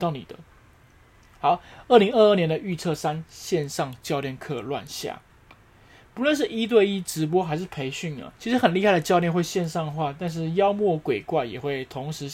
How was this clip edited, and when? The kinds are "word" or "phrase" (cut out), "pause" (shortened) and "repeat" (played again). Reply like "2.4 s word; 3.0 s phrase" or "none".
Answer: 8.3 s pause